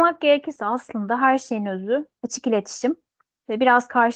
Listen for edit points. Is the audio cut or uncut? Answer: uncut